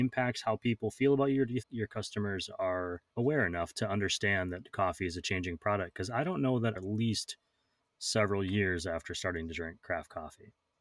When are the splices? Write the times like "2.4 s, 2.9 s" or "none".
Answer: 1.6 s, 3.1 s, 6.8 s

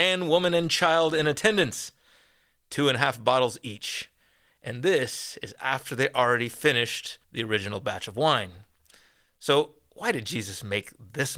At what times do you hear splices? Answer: 7.2 s

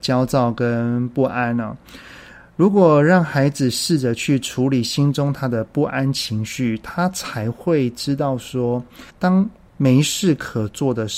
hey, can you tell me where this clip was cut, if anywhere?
9.1 s

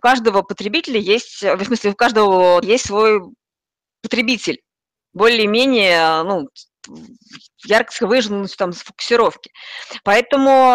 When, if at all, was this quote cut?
2.6 s, 8.0 s

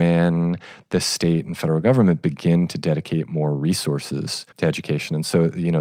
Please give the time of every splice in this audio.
4.5 s

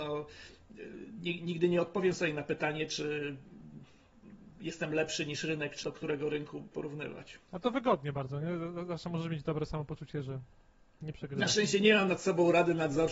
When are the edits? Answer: 5.8 s, 6.7 s, 7.5 s

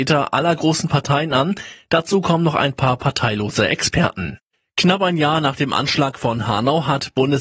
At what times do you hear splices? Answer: 4.5 s

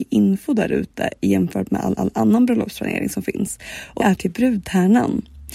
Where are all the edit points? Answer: 2.0 s, 4.0 s

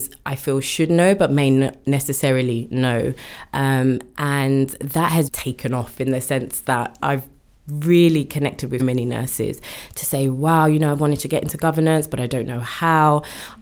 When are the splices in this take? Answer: 5.3 s, 7.0 s, 8.8 s

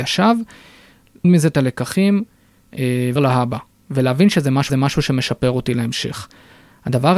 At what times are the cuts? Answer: 1.2 s, 3.2 s, 4.7 s

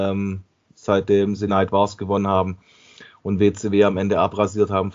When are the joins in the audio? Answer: 1.5 s

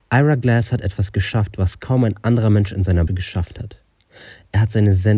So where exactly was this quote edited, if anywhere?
3.1 s

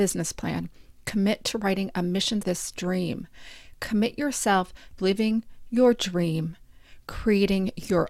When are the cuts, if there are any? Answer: 2.4 s, 5.0 s

